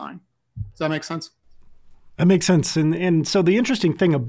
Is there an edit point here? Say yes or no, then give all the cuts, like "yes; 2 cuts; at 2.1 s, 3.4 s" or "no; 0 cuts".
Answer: no; 0 cuts